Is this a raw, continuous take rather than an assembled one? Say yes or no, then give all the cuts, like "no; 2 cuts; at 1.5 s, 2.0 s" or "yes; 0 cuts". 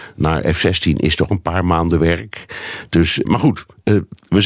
no; 2 cuts; at 1.3 s, 3.2 s